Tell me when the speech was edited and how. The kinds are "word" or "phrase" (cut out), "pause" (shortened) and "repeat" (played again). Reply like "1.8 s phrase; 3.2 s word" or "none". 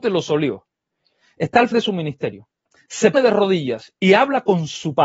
1.7 s word; 3.1 s word